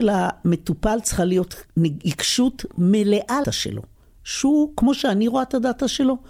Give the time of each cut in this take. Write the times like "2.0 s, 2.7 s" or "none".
1.7 s, 3.4 s